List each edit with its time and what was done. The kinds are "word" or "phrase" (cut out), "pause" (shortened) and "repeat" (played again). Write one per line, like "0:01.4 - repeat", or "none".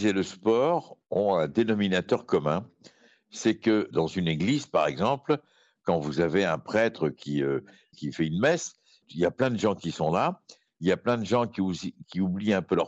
none